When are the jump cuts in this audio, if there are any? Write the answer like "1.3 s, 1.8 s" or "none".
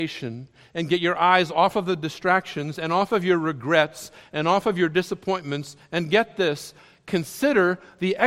none